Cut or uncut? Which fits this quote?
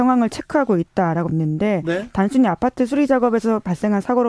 cut